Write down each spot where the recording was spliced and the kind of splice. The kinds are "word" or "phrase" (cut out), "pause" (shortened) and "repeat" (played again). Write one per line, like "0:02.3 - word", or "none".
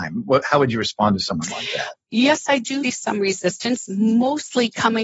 0:02.8 - word